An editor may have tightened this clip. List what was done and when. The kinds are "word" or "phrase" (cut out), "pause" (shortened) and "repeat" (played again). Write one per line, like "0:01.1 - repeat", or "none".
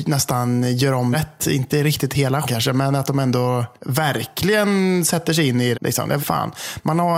0:01.1 - word
0:02.4 - word
0:03.8 - pause
0:05.7 - phrase
0:06.2 - phrase